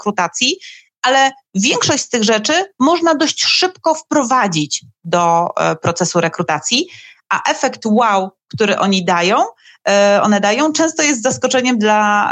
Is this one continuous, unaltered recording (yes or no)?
yes